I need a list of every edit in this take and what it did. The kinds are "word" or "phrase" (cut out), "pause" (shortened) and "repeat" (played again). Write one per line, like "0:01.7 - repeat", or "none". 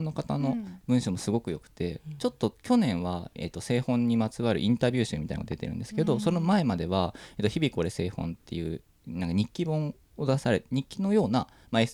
0:10.0 - pause